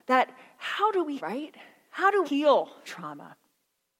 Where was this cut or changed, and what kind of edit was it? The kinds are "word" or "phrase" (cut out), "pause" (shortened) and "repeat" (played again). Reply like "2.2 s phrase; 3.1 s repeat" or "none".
1.2 s word; 2.2 s word; 2.8 s word